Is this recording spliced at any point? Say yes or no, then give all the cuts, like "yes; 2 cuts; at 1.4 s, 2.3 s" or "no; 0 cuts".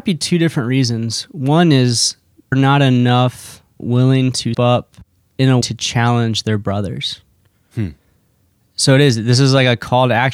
yes; 4 cuts; at 2.5 s, 3.8 s, 4.5 s, 5.6 s